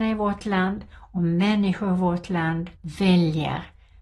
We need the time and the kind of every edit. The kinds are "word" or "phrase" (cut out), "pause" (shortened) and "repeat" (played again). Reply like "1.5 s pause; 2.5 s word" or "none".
2.8 s pause